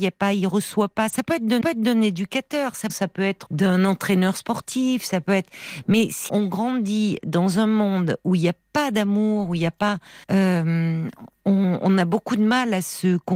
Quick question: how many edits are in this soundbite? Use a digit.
5